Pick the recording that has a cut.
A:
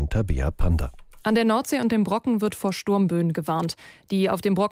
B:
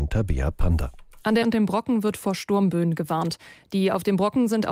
B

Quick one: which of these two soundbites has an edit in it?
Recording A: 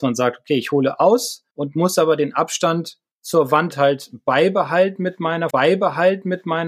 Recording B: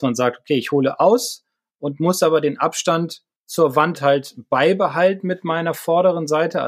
A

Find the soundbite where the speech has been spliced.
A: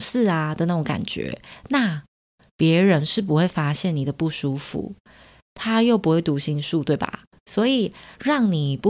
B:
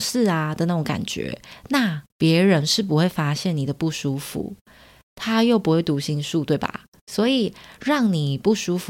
B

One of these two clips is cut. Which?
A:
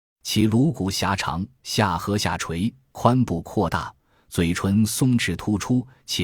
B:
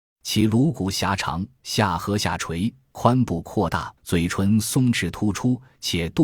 B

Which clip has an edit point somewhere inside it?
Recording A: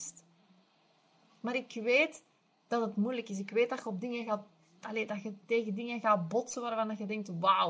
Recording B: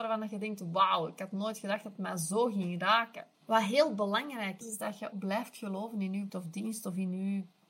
B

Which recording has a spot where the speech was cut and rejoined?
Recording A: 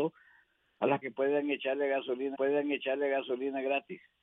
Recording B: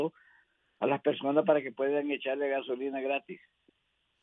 A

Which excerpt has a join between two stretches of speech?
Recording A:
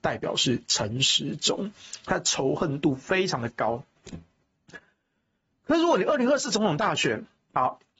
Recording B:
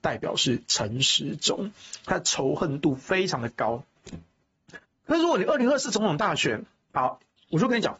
B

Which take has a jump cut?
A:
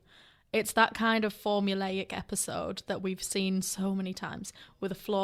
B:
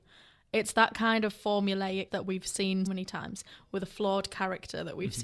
B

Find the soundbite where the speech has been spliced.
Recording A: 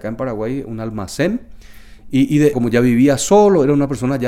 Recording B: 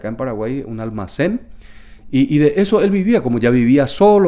A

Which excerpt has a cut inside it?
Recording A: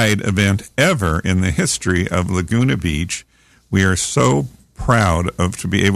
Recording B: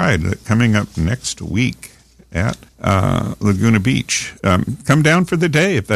B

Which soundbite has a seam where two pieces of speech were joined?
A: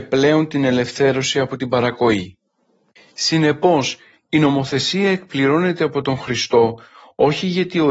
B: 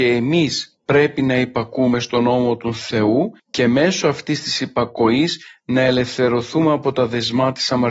B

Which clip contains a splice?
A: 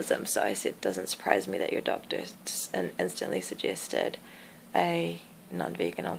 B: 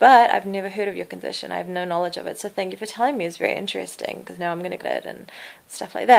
B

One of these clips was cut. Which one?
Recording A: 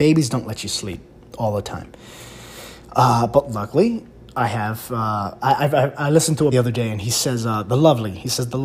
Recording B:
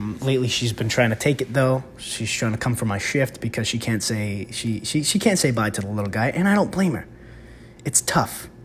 A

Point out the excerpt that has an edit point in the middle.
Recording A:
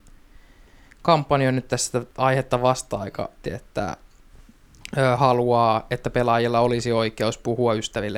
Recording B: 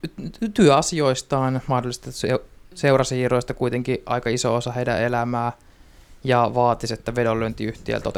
A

